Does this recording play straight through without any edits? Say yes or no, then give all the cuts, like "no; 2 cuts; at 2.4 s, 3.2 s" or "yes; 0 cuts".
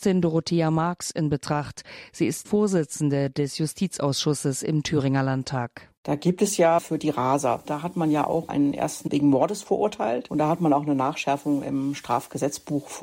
no; 4 cuts; at 2.4 s, 6.8 s, 8.5 s, 9.1 s